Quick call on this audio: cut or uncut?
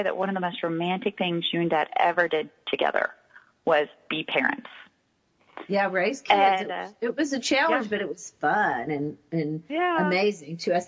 uncut